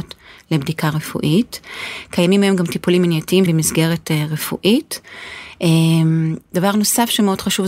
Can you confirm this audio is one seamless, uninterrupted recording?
no; 1 cut; at 3.5 s

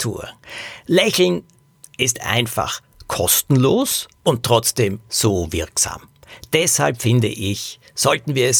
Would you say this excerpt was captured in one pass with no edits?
no; 1 cut; at 4.2 s

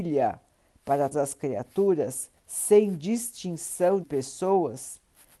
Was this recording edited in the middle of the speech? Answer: yes; 3 cuts; at 1.1 s, 2.4 s, 4.0 s

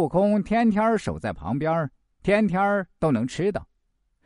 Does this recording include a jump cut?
no; 0 cuts

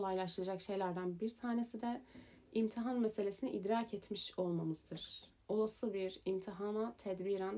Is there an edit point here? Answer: no; 0 cuts

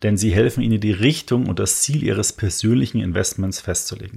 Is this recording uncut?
yes; 0 cuts

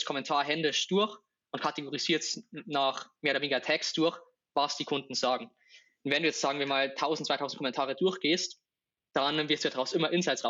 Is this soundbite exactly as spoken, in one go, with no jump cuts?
yes; 0 cuts

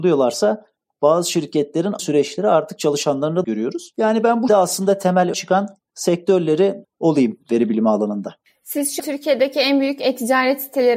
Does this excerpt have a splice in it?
yes; 6 cuts; at 2.0 s, 3.4 s, 4.5 s, 5.3 s, 6.8 s, 9.0 s

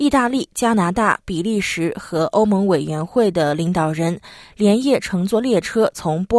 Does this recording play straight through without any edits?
yes; 0 cuts

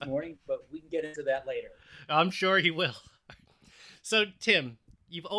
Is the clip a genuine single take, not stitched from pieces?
yes; 0 cuts

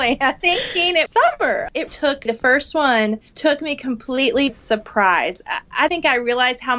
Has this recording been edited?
yes; 6 cuts; at 1.1 s, 1.9 s, 2.3 s, 3.3 s, 4.5 s, 5.9 s

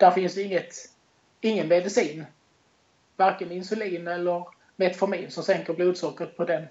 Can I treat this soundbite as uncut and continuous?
yes; 0 cuts

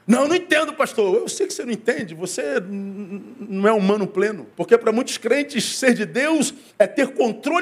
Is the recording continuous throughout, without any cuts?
no; 1 cut; at 4.5 s

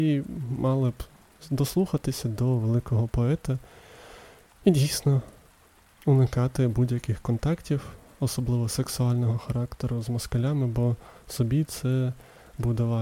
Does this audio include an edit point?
no; 0 cuts

